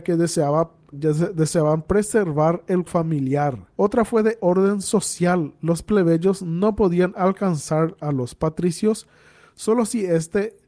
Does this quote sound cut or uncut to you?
cut